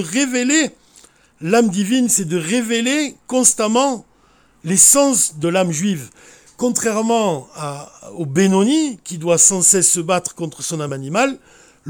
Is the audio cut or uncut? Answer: uncut